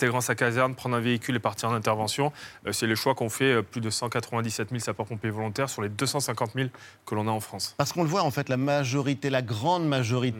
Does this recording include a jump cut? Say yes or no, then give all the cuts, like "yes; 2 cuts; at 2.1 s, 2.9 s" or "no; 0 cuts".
no; 0 cuts